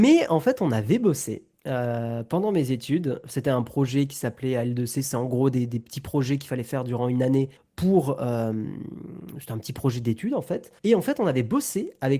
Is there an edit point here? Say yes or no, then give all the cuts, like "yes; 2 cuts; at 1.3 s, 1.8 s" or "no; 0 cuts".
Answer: yes; 3 cuts; at 1.6 s, 7.6 s, 10.8 s